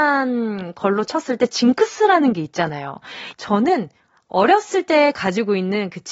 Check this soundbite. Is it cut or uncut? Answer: uncut